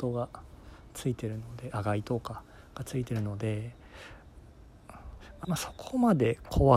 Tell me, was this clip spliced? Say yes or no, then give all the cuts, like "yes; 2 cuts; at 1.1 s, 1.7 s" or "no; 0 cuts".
yes; 1 cut; at 5.4 s